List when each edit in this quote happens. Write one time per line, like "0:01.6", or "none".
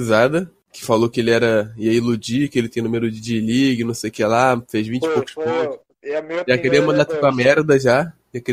none